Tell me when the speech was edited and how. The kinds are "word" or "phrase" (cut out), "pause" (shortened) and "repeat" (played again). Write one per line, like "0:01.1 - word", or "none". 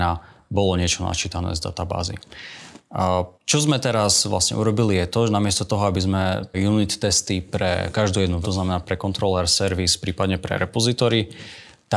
0:03.3 - pause
0:06.5 - word
0:08.4 - word